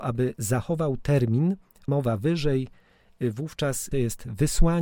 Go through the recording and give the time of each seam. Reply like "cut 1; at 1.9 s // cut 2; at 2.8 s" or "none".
cut 1; at 1.9 s // cut 2; at 3.9 s

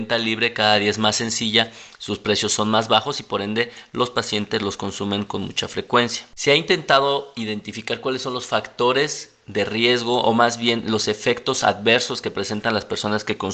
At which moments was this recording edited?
none

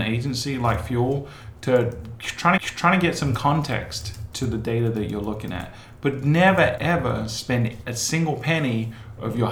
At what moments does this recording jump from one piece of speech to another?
cut 1; at 2.6 s // cut 2; at 6.8 s

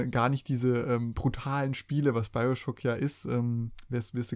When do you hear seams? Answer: none

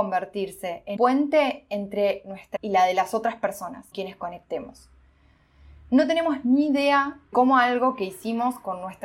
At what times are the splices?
cut 1; at 1.0 s // cut 2; at 2.6 s // cut 3; at 3.9 s // cut 4; at 7.3 s

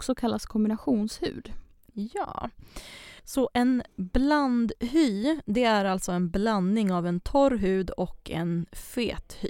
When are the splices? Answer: cut 1; at 3.2 s

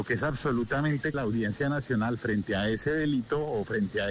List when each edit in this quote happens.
cut 1; at 1.1 s

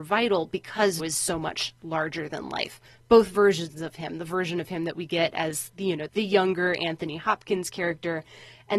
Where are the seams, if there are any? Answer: cut 1; at 1.0 s // cut 2; at 6.1 s

